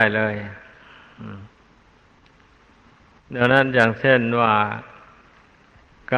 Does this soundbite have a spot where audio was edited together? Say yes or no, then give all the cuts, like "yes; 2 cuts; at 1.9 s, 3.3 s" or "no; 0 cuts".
no; 0 cuts